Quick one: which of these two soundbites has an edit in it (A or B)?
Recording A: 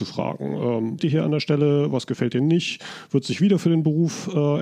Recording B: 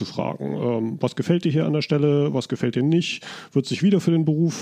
A